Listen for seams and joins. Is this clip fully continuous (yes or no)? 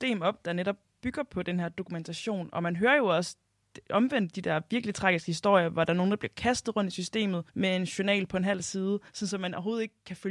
no